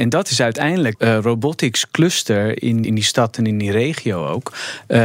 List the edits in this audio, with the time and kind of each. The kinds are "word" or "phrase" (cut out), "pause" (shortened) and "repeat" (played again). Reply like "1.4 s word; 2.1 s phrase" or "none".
0.9 s phrase; 2.8 s word

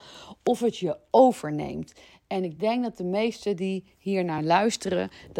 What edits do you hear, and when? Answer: none

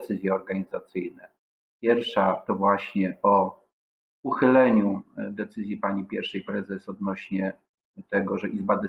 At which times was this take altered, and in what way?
none

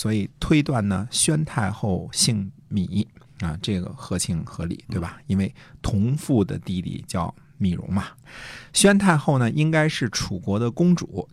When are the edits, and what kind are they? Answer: none

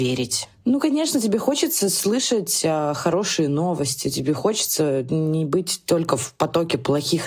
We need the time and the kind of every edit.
none

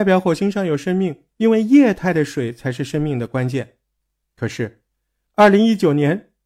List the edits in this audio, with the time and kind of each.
none

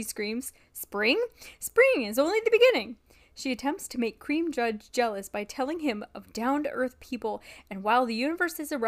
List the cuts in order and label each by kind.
none

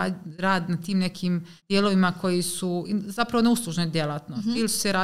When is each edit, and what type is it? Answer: 1.6 s pause

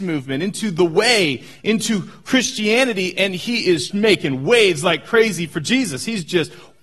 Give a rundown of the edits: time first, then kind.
3.9 s word

